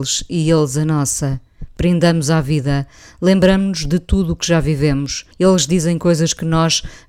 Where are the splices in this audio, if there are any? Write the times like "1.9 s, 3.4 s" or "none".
5.3 s